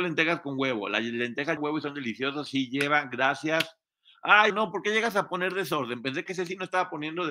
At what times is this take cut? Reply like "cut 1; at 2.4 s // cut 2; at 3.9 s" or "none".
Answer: cut 1; at 1.6 s // cut 2; at 4.5 s // cut 3; at 6.3 s

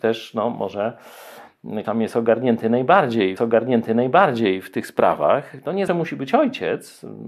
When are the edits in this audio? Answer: cut 1; at 1.8 s // cut 2; at 3.4 s // cut 3; at 5.9 s

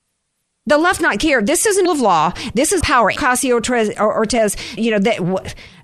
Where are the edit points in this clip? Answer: cut 1; at 1.0 s // cut 2; at 1.9 s // cut 3; at 2.8 s // cut 4; at 3.2 s // cut 5; at 4.8 s

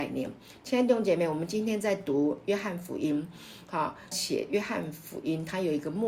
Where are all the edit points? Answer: cut 1; at 4.1 s

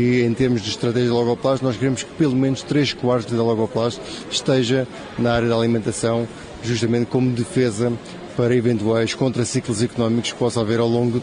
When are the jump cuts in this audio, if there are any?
cut 1; at 3.3 s

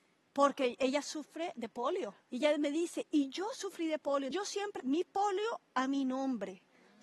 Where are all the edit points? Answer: cut 1; at 2.2 s // cut 2; at 4.3 s // cut 3; at 4.8 s

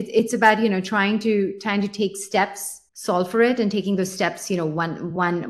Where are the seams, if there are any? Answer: cut 1; at 2.9 s

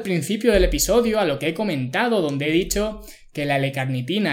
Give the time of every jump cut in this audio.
none

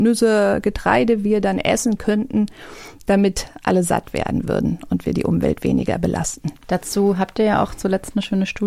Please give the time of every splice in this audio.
none

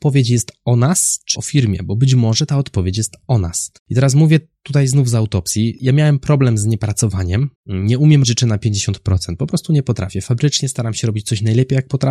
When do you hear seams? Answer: cut 1; at 1.3 s // cut 2; at 3.8 s // cut 3; at 7.6 s // cut 4; at 8.2 s

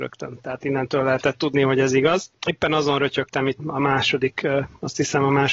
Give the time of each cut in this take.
cut 1; at 3.6 s

